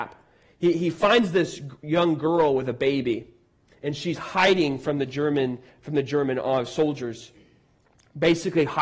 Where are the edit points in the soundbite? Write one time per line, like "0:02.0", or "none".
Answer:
none